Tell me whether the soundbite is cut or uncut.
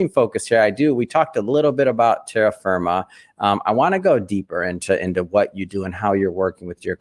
uncut